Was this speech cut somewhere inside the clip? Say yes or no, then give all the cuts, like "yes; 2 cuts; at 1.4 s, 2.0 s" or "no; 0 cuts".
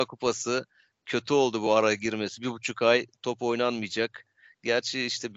no; 0 cuts